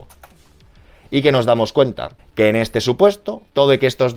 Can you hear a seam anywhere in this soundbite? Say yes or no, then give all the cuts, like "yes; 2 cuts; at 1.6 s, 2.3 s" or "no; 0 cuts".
yes; 1 cut; at 2.2 s